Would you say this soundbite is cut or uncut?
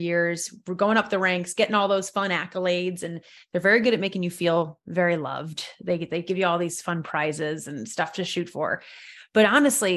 uncut